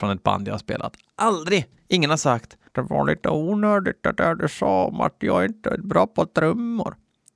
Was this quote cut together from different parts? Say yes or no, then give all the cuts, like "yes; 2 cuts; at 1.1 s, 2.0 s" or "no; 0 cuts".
yes; 1 cut; at 2.7 s